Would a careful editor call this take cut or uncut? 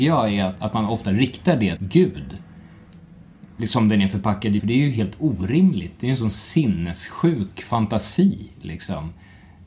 cut